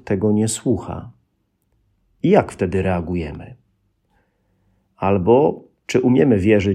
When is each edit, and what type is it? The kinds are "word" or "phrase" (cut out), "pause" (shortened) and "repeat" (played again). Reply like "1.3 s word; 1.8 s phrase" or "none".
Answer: none